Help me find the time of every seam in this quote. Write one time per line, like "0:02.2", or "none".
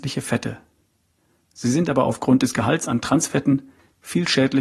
none